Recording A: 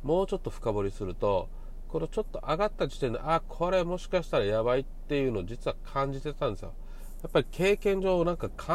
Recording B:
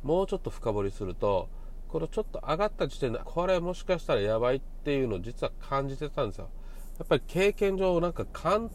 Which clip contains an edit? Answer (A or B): B